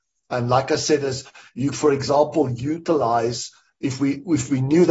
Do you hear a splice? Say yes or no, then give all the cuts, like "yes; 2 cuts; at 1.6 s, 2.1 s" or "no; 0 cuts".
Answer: yes; 1 cut; at 1.7 s